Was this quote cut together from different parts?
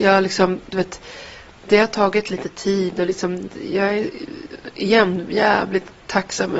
no; 0 cuts

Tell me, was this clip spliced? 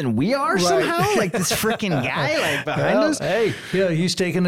no; 0 cuts

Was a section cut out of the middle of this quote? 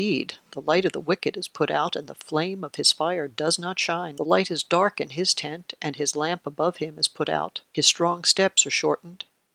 no; 0 cuts

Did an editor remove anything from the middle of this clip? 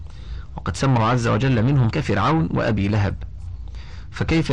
yes; 2 cuts; at 1.0 s, 1.9 s

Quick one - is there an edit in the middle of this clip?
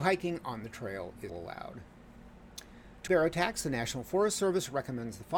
yes; 2 cuts; at 1.3 s, 3.1 s

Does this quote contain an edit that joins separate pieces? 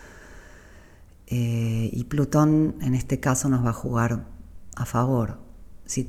no; 0 cuts

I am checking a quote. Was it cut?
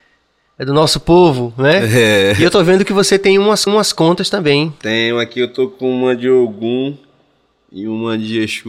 yes; 1 cut; at 3.7 s

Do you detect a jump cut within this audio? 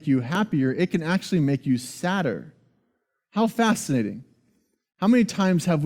no; 0 cuts

